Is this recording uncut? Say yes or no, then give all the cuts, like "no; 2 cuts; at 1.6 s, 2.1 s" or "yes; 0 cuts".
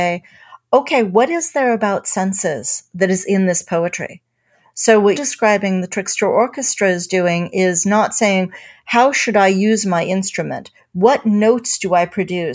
no; 1 cut; at 5.2 s